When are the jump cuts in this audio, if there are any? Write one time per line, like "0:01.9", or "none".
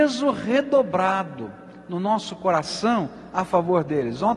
none